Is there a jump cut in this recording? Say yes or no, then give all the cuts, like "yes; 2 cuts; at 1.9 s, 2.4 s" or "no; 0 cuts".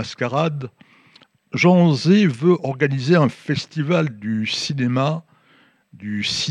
no; 0 cuts